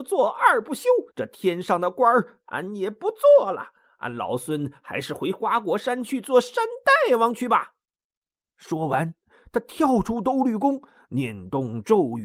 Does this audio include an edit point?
yes; 1 cut; at 1.1 s

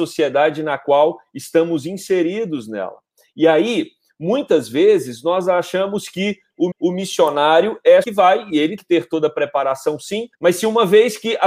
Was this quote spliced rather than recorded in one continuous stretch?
yes; 4 cuts; at 6.7 s, 8.0 s, 8.8 s, 10.3 s

